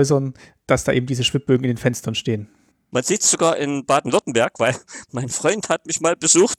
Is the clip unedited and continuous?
no; 1 cut; at 2.7 s

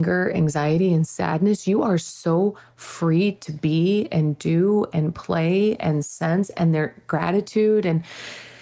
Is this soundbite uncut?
yes; 0 cuts

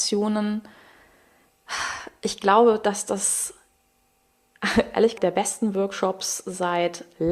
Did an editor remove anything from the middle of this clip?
yes; 1 cut; at 5.2 s

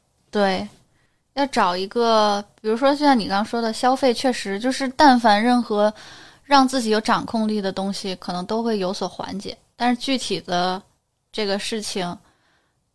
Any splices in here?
no; 0 cuts

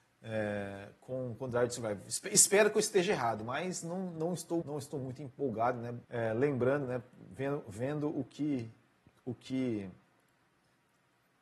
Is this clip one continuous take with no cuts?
no; 2 cuts; at 4.6 s, 6.0 s

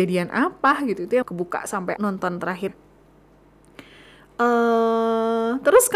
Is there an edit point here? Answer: yes; 3 cuts; at 1.2 s, 2.0 s, 2.7 s

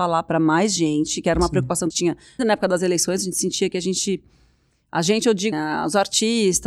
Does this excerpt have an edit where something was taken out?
yes; 3 cuts; at 1.9 s, 2.4 s, 5.5 s

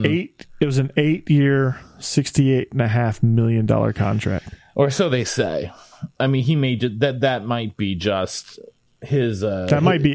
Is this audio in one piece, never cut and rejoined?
yes; 0 cuts

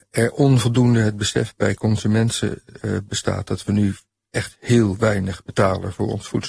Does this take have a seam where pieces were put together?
no; 0 cuts

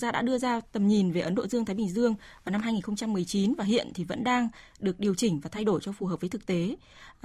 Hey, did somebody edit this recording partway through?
no; 0 cuts

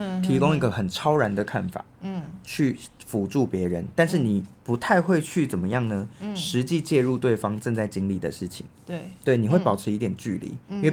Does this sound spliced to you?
no; 0 cuts

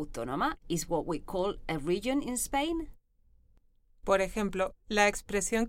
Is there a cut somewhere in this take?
no; 0 cuts

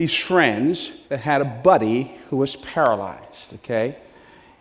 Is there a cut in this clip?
yes; 1 cut; at 1.0 s

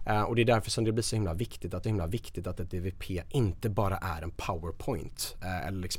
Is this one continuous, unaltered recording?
no; 1 cut; at 1.8 s

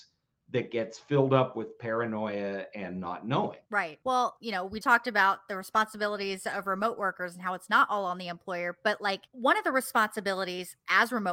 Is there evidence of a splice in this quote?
yes; 4 cuts; at 3.6 s, 4.4 s, 4.8 s, 9.3 s

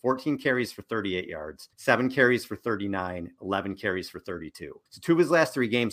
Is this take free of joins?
no; 2 cuts; at 1.7 s, 4.9 s

